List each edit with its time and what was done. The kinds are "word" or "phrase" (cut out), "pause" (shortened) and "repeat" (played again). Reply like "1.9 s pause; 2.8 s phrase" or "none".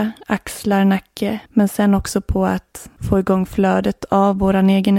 1.5 s pause